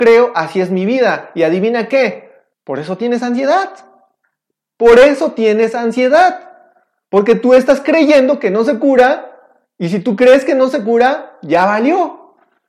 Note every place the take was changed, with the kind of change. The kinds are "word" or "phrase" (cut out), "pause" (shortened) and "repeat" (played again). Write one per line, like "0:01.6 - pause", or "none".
0:02.5 - pause

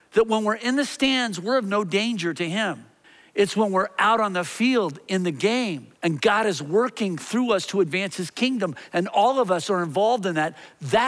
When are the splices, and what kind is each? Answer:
0:03.0 - pause
0:05.9 - pause

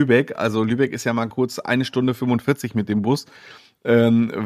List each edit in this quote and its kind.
none

